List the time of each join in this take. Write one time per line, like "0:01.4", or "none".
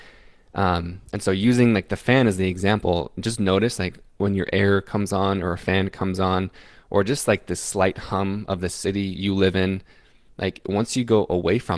none